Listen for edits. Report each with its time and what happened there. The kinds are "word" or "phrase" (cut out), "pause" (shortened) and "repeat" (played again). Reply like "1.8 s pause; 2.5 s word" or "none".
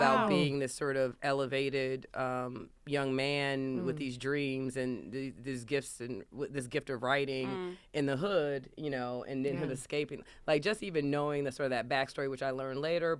2.8 s pause